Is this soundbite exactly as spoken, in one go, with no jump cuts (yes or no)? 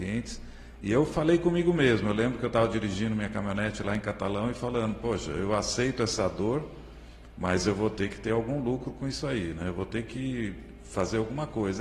yes